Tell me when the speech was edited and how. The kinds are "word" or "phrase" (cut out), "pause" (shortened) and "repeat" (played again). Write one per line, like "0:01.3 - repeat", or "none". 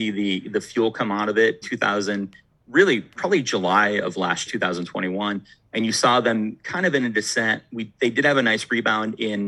0:01.6 - word
0:03.2 - word
0:04.5 - word